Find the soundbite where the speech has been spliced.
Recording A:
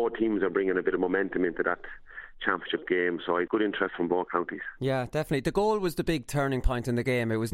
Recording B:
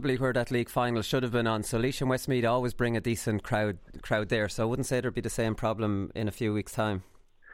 A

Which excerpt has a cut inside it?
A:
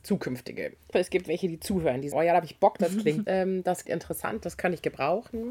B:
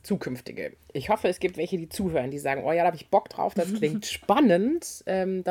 A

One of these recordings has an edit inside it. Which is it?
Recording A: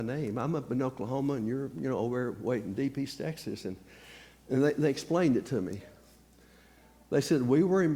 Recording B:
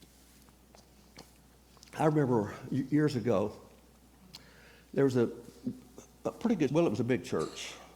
B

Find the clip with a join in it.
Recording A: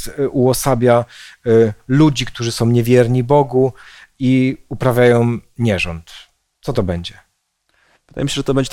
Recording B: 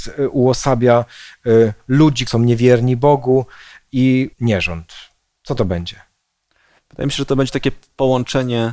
B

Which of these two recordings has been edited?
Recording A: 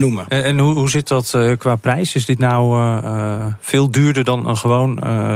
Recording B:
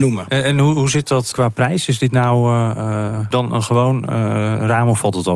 B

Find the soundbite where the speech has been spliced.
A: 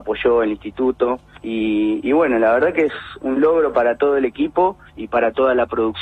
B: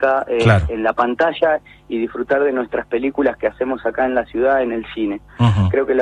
A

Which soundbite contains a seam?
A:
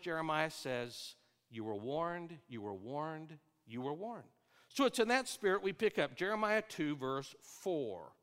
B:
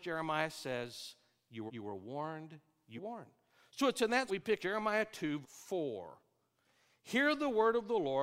B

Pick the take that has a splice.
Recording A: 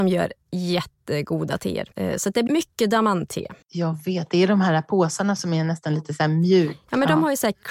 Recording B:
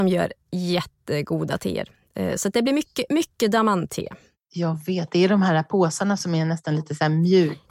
A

